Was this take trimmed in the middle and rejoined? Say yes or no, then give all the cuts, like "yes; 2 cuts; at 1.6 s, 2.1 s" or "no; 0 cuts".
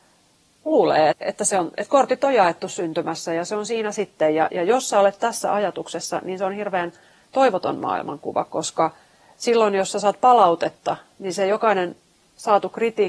yes; 2 cuts; at 1.1 s, 4.5 s